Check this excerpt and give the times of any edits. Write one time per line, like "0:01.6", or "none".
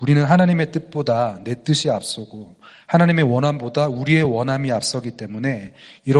none